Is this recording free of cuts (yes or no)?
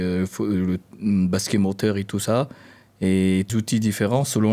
no